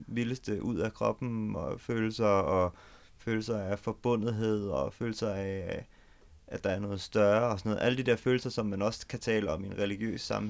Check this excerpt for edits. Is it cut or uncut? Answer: uncut